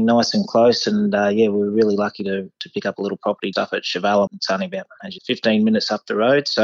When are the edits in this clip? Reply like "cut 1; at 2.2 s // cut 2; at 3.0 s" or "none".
cut 1; at 3.5 s // cut 2; at 4.3 s // cut 3; at 5.2 s